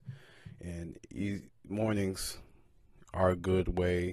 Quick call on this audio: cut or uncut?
uncut